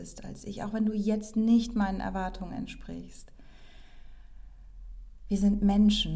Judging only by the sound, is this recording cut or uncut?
uncut